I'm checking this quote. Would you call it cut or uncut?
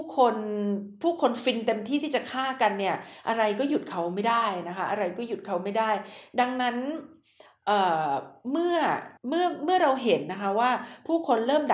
cut